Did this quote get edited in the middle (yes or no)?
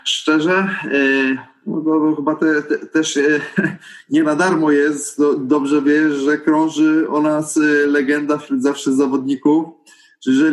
no